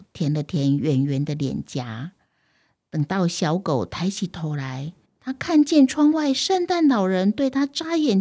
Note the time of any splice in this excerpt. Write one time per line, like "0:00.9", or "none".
0:05.1